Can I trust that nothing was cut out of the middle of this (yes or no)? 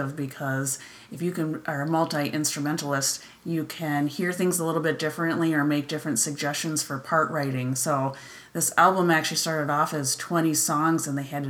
yes